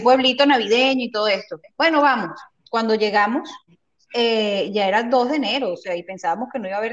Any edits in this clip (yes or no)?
no